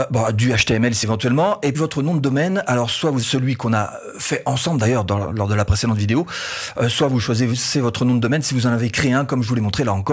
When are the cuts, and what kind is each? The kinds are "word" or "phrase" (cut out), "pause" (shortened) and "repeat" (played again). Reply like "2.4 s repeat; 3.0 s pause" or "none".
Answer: 1.0 s phrase; 1.7 s word; 3.2 s word